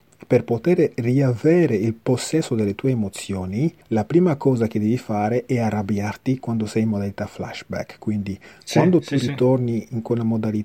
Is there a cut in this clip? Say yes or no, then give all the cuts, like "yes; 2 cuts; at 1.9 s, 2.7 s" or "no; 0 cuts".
no; 0 cuts